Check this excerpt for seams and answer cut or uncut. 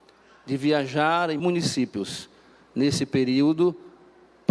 cut